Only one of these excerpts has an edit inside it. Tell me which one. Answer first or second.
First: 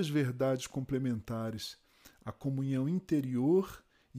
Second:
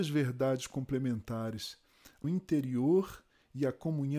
second